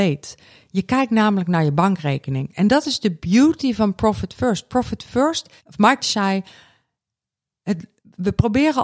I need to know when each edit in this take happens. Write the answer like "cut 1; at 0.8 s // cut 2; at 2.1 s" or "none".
cut 1; at 5.6 s // cut 2; at 6.0 s